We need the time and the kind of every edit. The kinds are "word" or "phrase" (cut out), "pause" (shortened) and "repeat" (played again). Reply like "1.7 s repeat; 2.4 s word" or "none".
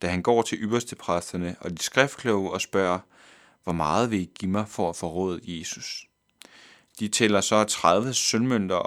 none